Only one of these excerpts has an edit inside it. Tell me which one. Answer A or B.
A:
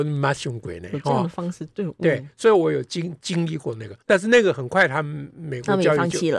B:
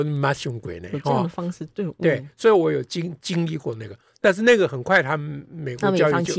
A